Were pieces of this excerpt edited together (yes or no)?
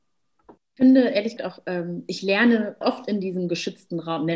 yes